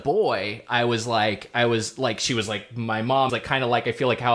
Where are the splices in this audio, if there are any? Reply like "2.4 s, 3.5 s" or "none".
3.3 s